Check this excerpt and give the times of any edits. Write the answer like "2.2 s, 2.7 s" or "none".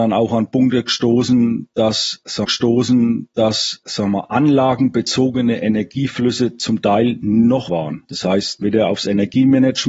2.4 s, 7.7 s, 8.6 s